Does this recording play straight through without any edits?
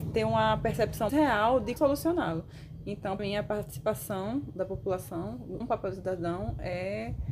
no; 4 cuts; at 1.1 s, 1.8 s, 3.2 s, 5.6 s

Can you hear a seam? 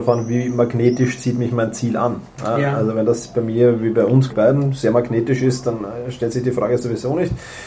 yes; 1 cut; at 4.3 s

